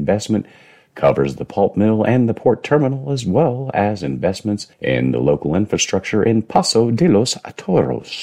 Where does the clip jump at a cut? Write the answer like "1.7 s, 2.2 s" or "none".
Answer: 4.7 s